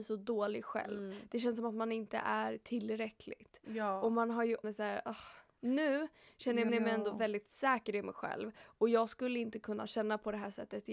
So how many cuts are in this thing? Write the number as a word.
two